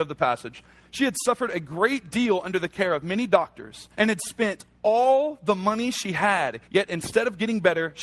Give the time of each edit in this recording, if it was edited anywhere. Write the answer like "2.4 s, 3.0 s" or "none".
3.9 s, 6.6 s